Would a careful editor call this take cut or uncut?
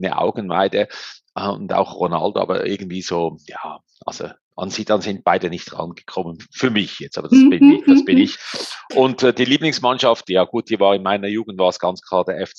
uncut